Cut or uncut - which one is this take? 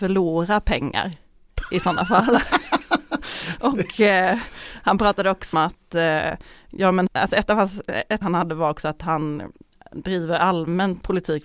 cut